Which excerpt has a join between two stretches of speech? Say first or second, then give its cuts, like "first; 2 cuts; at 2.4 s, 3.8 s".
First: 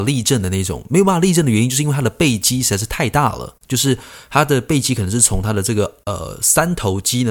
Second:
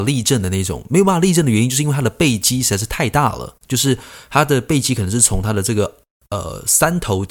first; 1 cut; at 6.0 s